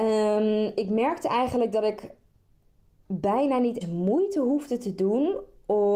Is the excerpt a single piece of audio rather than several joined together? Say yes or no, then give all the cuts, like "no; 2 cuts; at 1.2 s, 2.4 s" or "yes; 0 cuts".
no; 1 cut; at 3.8 s